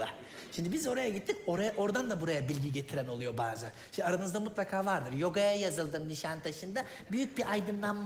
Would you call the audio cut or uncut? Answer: uncut